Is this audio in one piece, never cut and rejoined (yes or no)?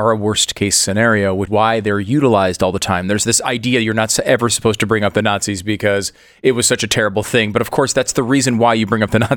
no